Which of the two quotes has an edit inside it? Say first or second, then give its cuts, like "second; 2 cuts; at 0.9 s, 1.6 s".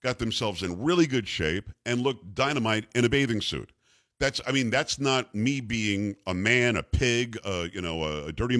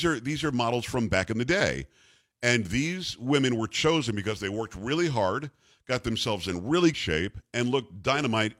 second; 1 cut; at 6.9 s